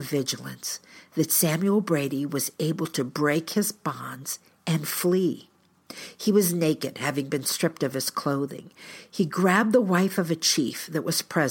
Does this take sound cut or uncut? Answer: uncut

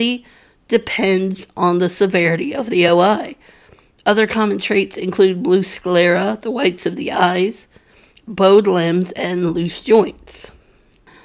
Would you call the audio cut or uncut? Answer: uncut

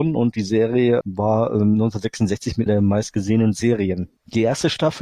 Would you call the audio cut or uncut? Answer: cut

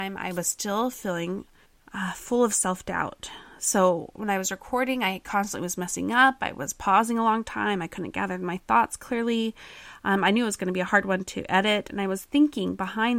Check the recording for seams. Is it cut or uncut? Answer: cut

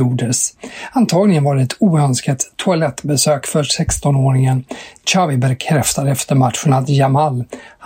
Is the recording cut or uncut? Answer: uncut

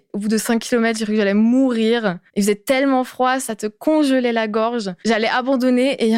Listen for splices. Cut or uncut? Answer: cut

